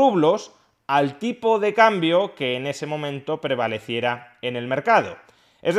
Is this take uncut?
yes; 0 cuts

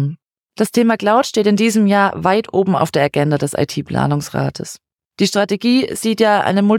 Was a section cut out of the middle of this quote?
no; 0 cuts

